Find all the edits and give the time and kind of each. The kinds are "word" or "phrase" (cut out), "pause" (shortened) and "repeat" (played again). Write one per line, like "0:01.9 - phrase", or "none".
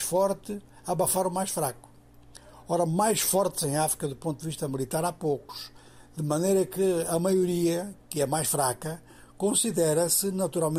none